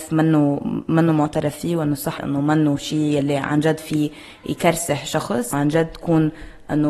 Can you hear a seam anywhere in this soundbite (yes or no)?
yes